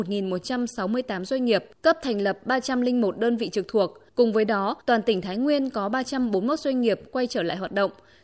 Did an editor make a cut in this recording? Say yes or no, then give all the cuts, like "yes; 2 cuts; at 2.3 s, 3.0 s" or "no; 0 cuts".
yes; 3 cuts; at 1.7 s, 4.1 s, 4.8 s